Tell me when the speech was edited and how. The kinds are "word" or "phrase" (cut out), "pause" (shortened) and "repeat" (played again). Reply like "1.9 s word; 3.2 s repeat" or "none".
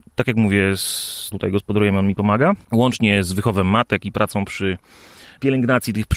1.3 s word; 2.6 s pause